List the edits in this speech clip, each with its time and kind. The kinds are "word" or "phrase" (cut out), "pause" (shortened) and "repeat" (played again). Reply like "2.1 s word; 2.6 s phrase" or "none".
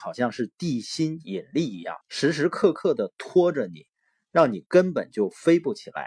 2.0 s pause